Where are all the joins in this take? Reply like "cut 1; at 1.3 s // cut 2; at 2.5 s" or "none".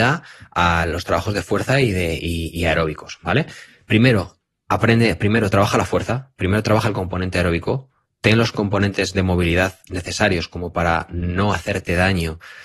none